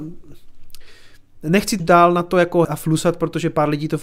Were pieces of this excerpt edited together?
yes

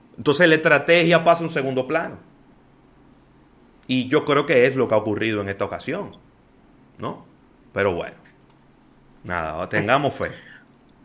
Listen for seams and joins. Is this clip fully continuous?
yes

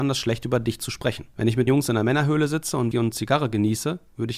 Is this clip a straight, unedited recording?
no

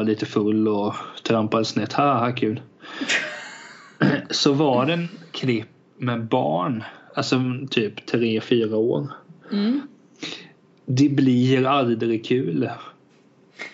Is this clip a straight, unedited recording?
yes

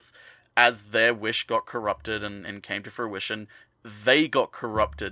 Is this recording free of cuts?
yes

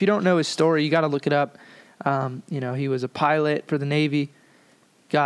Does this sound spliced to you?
no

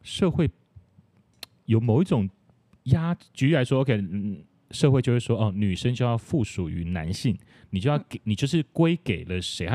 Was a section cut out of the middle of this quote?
no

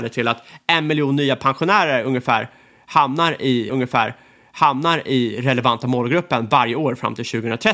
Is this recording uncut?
no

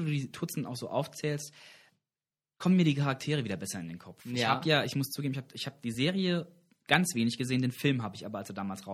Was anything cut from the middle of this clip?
no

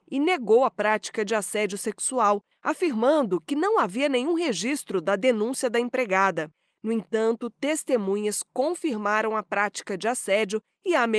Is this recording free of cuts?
yes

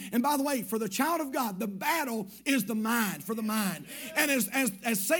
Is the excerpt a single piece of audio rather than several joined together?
yes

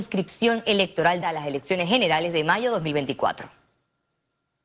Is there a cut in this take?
yes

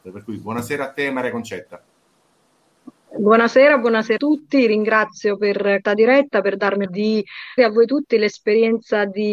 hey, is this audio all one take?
no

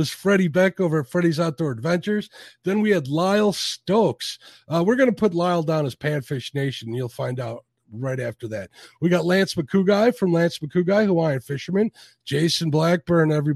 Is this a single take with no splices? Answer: yes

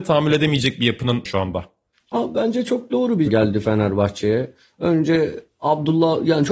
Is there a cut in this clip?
yes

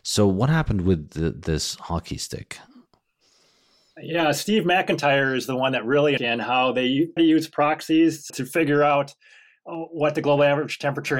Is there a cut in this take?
yes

